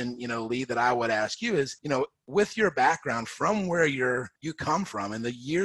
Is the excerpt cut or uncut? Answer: cut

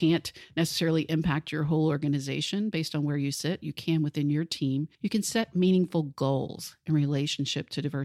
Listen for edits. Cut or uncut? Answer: cut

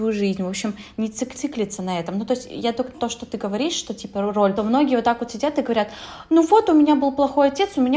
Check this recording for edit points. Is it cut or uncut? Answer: cut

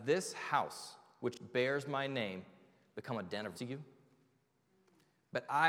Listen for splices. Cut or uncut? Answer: cut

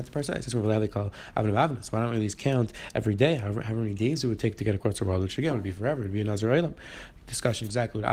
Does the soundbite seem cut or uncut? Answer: uncut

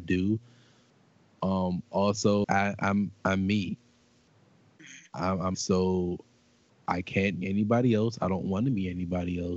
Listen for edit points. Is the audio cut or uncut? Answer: cut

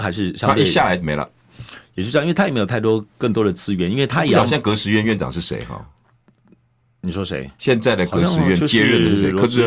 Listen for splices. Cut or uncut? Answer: uncut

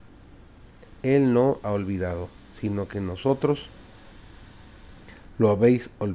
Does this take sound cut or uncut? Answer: cut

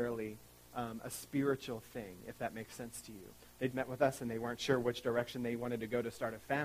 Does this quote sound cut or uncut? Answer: cut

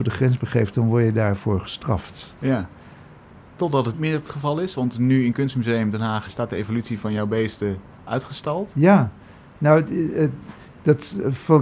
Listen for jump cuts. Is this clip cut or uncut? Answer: cut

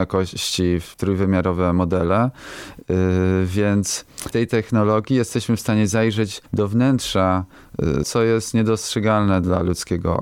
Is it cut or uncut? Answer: cut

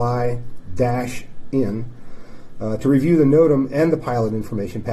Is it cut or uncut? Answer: uncut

